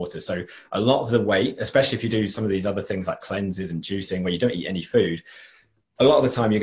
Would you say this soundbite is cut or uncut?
uncut